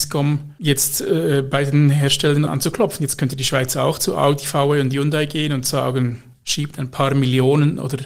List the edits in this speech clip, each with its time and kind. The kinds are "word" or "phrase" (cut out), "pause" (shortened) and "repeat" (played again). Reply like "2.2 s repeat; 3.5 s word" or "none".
2.5 s phrase